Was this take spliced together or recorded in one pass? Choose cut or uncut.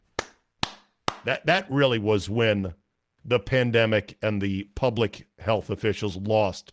uncut